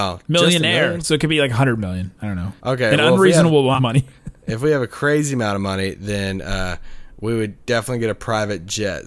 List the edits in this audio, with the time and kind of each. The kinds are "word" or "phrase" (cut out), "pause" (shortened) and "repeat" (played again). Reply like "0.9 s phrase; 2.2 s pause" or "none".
2.6 s pause; 3.8 s word; 4.2 s pause